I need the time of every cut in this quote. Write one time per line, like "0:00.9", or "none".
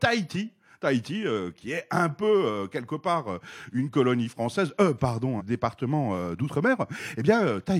0:05.4